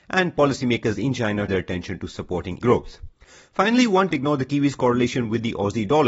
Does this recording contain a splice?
yes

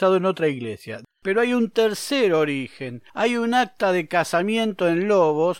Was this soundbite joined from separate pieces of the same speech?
yes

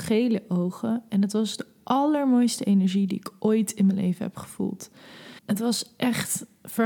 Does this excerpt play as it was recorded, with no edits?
no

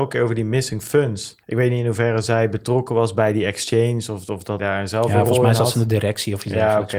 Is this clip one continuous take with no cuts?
no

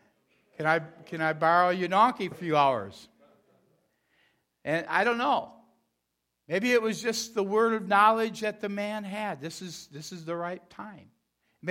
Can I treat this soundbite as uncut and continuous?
no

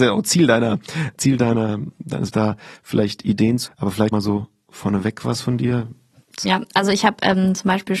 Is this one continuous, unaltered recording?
no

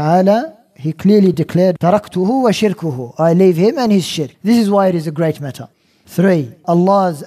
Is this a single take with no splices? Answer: yes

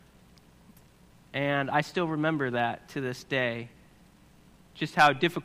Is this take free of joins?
yes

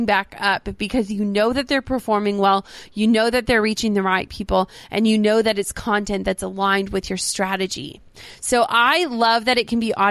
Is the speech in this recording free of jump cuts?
yes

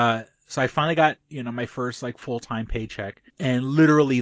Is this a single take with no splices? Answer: no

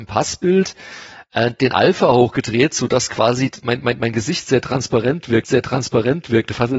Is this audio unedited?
no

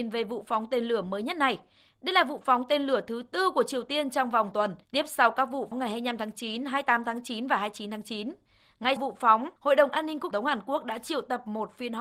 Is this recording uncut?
no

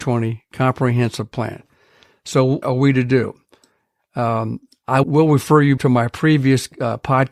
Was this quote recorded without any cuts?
no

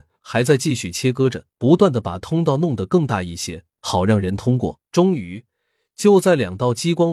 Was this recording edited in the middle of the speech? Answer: yes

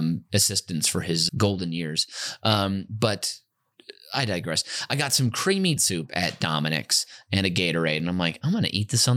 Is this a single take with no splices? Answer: no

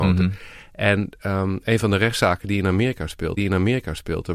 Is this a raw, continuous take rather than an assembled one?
no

